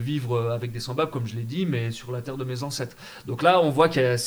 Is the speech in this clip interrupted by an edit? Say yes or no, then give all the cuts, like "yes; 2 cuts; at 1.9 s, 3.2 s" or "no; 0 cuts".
no; 0 cuts